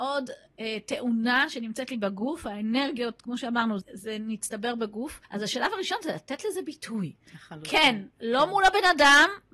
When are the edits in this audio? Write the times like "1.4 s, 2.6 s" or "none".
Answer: 3.8 s, 5.2 s